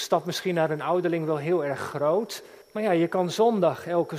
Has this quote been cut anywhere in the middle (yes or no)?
yes